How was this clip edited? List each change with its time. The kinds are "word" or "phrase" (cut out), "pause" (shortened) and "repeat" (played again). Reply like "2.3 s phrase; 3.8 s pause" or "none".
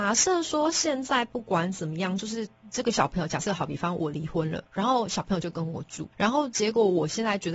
4.7 s pause; 6.1 s pause